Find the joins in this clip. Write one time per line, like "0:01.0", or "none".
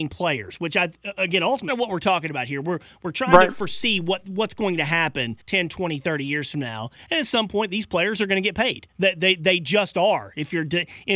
0:01.7
0:05.4